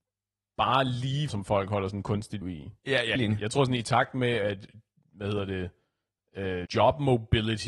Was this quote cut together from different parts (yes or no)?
yes